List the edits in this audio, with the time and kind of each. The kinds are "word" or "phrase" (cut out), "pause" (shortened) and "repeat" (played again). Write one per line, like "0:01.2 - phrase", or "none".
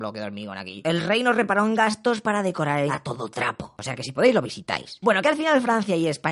0:02.9 - word